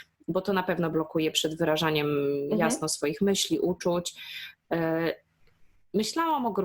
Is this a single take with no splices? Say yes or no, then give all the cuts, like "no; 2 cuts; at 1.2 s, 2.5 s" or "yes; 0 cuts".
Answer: yes; 0 cuts